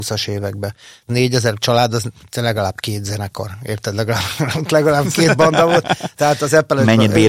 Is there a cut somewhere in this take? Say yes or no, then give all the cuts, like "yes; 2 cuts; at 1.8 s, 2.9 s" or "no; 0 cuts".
no; 0 cuts